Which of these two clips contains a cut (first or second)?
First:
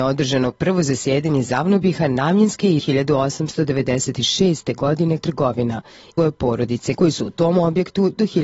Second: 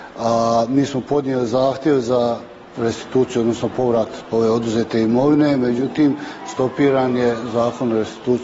first